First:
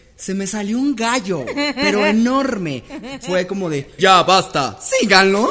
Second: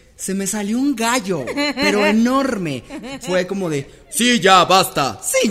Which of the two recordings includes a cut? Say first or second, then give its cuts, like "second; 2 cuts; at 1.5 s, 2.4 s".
first; 1 cut; at 4.0 s